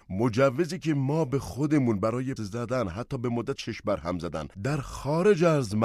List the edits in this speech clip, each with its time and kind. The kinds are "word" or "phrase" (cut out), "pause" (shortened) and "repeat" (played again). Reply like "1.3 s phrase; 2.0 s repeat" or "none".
2.4 s word; 3.6 s word; 4.5 s pause